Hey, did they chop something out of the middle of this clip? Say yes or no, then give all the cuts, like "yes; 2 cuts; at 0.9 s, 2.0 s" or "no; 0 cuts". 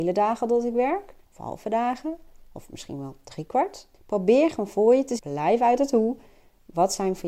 yes; 3 cuts; at 1.2 s, 3.9 s, 5.2 s